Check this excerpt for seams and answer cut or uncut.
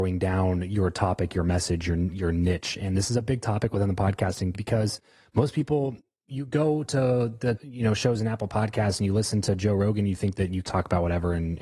cut